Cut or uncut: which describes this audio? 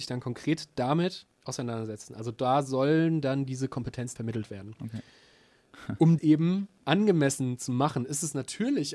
cut